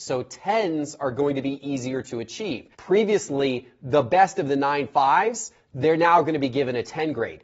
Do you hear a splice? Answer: yes; 1 cut; at 2.7 s

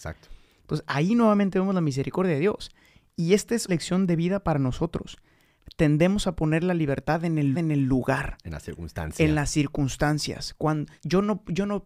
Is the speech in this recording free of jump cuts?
no; 3 cuts; at 3.7 s, 7.5 s, 11.0 s

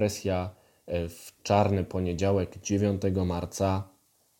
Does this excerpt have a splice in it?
no; 0 cuts

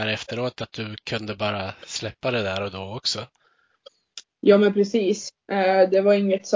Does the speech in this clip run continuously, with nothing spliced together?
yes; 0 cuts

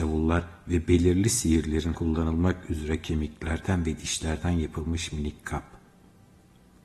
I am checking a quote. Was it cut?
yes; 1 cut; at 1.9 s

